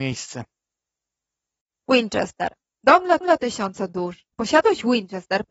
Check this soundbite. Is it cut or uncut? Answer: cut